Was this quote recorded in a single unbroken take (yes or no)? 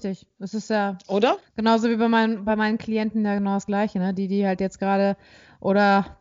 yes